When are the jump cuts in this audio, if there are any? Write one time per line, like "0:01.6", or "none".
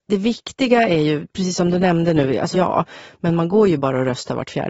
0:02.5